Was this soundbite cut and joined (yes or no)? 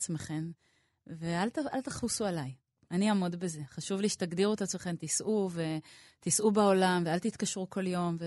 no